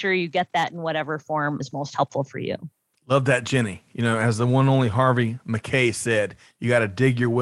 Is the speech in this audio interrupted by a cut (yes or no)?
yes